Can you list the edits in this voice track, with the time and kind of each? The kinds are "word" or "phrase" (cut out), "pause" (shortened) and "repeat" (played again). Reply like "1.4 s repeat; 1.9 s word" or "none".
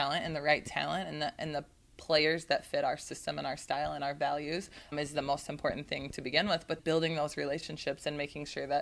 4.9 s word; 6.8 s word